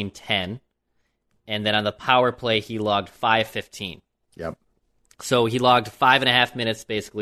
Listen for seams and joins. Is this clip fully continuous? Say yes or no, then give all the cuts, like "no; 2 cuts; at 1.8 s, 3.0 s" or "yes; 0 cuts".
yes; 0 cuts